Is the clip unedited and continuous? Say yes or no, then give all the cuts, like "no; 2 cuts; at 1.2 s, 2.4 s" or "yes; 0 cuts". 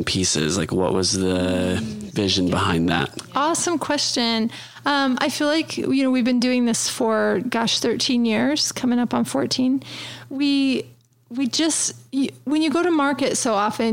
yes; 0 cuts